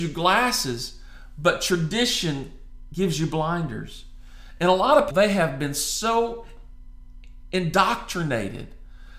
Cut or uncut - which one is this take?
cut